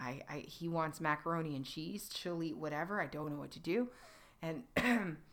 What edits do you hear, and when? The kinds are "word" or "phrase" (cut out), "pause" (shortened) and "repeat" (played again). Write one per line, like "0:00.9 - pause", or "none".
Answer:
none